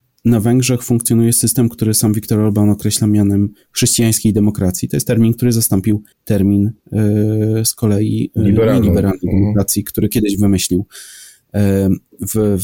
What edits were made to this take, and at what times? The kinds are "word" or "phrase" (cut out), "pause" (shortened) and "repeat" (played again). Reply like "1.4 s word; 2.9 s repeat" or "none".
6.1 s pause